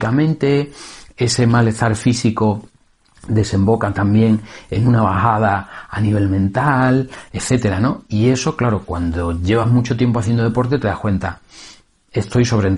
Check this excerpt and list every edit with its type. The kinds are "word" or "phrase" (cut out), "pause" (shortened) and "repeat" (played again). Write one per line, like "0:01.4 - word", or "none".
none

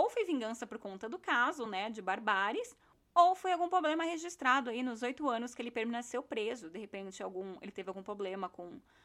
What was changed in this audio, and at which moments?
none

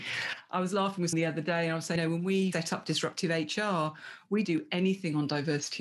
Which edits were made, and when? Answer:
0:01.1 - word
0:02.0 - word
0:02.5 - word
0:04.4 - word

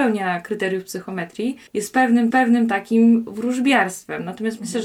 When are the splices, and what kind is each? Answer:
0:01.7 - pause
0:02.3 - repeat

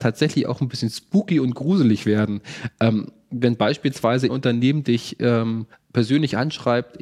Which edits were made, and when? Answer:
0:04.3 - word
0:05.7 - pause

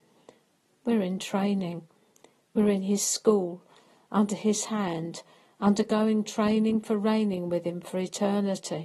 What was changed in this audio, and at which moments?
none

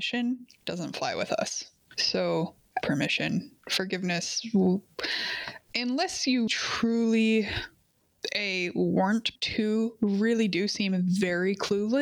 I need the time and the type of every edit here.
0:02.8 - word
0:06.5 - word
0:09.4 - phrase

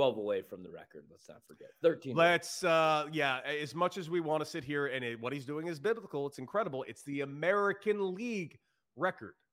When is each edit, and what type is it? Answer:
none

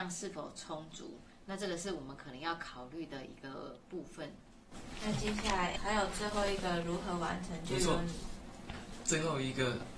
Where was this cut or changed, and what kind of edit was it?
0:05.8 - word

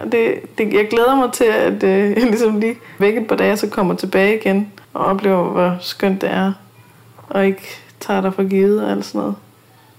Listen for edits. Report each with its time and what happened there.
0:03.0 - word
0:04.8 - pause

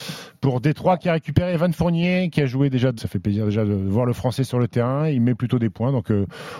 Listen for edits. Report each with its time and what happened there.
0:03.0 - word

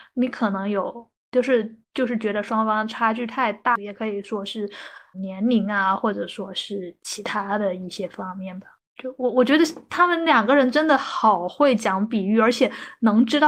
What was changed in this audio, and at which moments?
0:01.8 - pause
0:05.1 - word
0:08.8 - pause

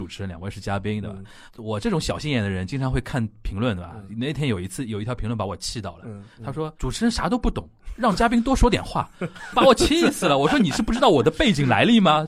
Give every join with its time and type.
0:06.3 - pause
0:09.5 - word

